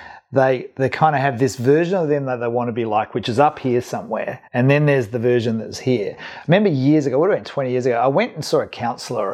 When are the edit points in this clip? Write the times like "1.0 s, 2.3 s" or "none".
4.5 s